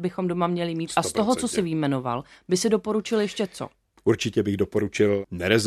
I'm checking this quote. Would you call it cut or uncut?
uncut